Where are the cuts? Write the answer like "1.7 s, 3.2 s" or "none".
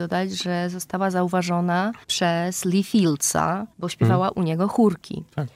2.0 s, 3.7 s

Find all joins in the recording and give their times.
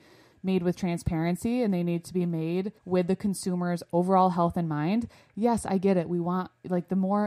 2.8 s

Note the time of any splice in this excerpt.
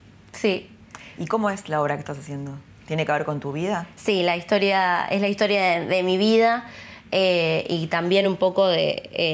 none

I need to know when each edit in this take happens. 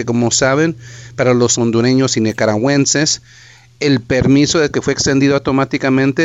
1.6 s, 4.7 s

